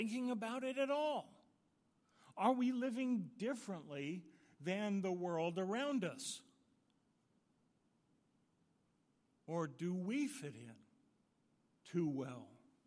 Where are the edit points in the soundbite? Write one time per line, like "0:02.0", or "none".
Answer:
none

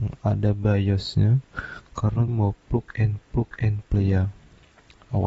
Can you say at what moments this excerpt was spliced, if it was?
0:02.3
0:03.2

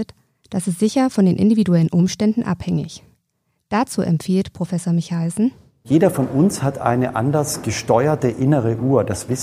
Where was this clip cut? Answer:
none

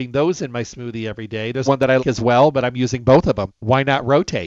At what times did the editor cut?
0:01.7
0:02.0
0:03.5

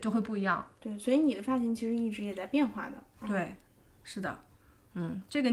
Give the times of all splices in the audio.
none

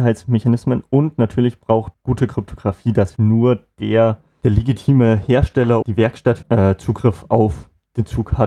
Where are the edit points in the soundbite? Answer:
0:01.9
0:03.2
0:05.8
0:06.4

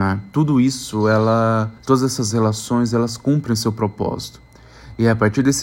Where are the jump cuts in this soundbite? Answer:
0:01.8

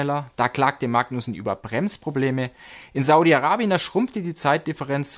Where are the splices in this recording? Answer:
none

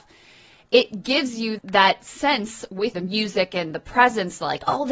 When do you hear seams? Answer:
0:01.6
0:02.9

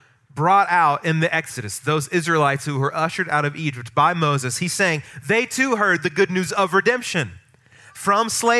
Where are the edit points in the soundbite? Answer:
none

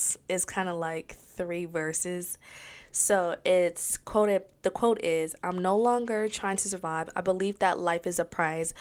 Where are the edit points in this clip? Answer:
none

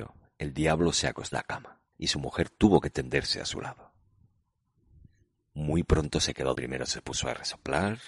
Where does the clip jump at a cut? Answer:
0:01.3
0:01.9
0:06.5

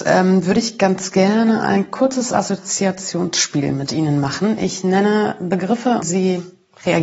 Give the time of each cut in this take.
0:06.0

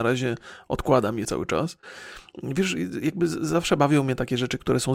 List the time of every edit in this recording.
0:01.2

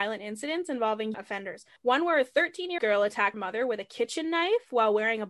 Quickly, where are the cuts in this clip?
0:01.1
0:01.8
0:02.8
0:03.3

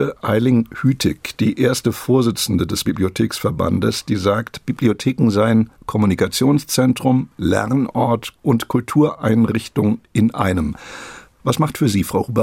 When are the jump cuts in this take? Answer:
0:02.9
0:05.8

